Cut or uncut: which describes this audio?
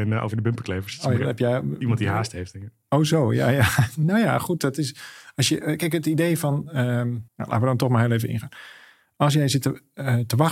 cut